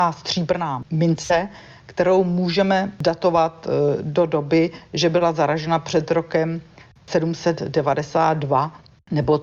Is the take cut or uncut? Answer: uncut